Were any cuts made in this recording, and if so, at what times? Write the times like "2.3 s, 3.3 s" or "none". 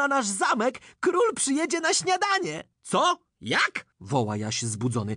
2.7 s, 3.9 s